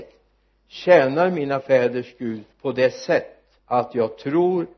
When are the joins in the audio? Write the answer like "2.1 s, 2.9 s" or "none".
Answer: 2.5 s, 3.6 s